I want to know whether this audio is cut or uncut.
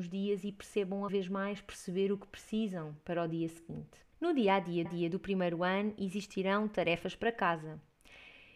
cut